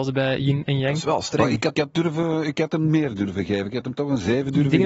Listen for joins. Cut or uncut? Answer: cut